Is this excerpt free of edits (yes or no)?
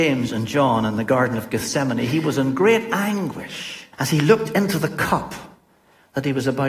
no